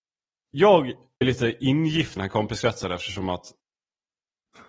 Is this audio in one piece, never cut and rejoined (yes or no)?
no